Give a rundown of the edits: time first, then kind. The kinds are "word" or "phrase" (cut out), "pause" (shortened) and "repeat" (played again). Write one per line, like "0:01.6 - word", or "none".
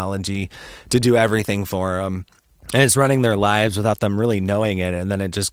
0:02.5 - pause